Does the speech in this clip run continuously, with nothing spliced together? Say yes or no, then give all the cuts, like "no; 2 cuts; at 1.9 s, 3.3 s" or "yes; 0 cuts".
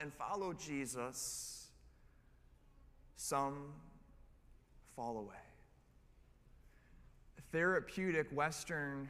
yes; 0 cuts